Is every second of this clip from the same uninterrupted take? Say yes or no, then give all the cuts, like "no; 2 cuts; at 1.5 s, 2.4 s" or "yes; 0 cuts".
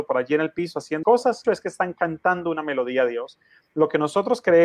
no; 2 cuts; at 1.0 s, 1.4 s